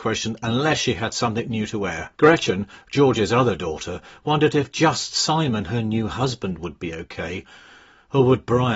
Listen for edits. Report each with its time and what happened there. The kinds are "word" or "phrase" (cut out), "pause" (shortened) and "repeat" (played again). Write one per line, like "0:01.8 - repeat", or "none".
0:02.1 - pause